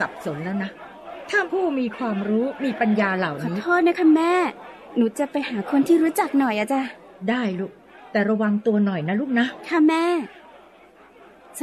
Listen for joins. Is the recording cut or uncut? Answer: uncut